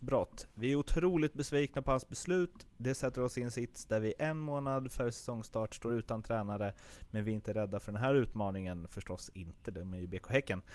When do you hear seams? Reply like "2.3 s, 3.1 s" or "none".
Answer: none